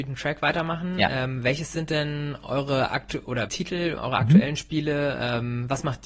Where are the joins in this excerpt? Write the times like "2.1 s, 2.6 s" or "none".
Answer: 3.5 s, 4.0 s